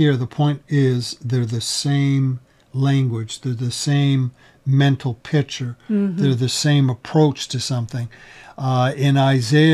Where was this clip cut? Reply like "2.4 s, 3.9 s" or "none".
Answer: none

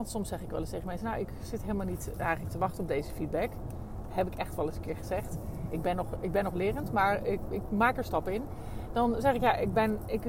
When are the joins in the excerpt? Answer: none

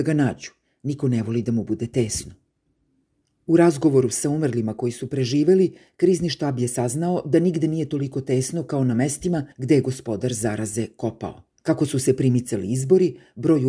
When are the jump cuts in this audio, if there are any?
9.5 s, 11.5 s

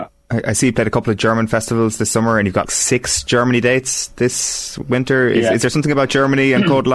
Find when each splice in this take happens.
2.6 s

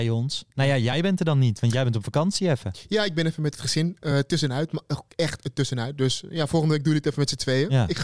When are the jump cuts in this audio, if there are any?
none

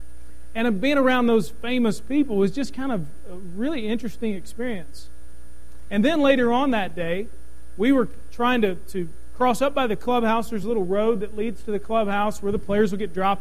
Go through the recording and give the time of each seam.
none

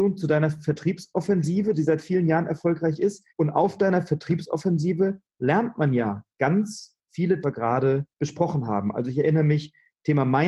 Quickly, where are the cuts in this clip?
3.3 s, 7.4 s, 8.1 s

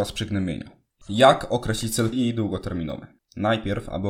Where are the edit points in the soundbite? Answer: 2.1 s, 3.2 s

